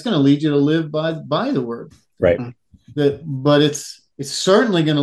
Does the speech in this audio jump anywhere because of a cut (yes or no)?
yes